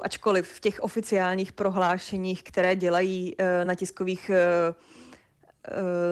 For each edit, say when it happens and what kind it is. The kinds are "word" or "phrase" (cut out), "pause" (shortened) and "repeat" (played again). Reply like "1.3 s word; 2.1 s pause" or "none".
3.7 s word